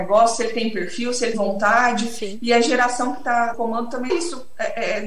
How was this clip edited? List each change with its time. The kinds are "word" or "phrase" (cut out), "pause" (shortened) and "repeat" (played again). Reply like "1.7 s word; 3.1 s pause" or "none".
1.3 s word; 3.5 s word; 4.1 s word